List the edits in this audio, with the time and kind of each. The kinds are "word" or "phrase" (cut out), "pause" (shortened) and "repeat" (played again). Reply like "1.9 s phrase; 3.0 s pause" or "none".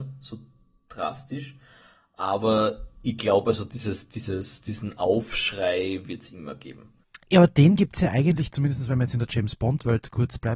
none